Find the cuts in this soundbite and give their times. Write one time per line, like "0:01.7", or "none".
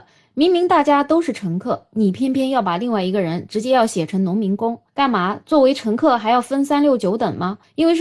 0:04.9